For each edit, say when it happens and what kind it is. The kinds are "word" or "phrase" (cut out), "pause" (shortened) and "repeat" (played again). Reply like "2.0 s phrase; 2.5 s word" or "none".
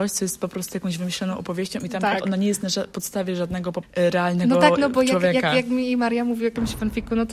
3.8 s word